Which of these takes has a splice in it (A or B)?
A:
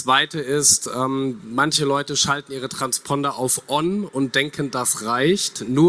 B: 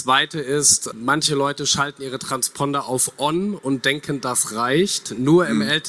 B